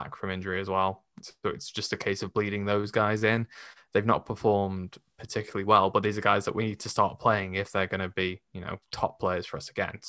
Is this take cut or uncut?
uncut